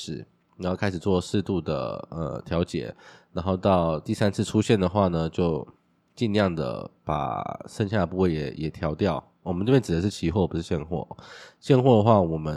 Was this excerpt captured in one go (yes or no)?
yes